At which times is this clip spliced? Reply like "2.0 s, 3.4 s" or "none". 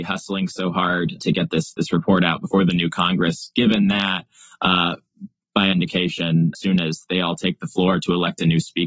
1.2 s, 5.7 s, 6.5 s